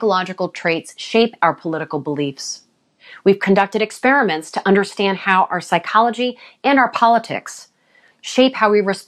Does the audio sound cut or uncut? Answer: uncut